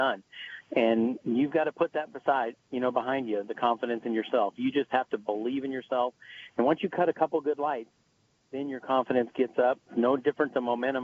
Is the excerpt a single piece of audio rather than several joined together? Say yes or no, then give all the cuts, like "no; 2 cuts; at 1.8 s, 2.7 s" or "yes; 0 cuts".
no; 1 cut; at 9.8 s